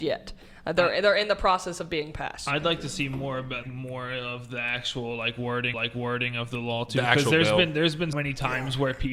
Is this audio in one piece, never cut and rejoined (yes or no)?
no